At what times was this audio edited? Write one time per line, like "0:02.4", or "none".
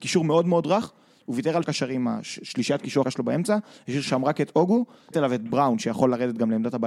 0:01.6
0:03.0
0:05.1
0:05.5